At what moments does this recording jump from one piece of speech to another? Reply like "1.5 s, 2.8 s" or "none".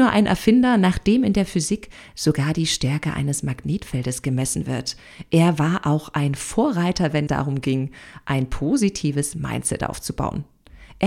7.3 s